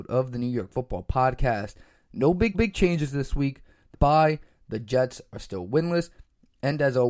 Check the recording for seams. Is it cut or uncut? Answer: cut